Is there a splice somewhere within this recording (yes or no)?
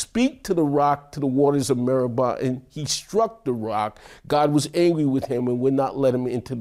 no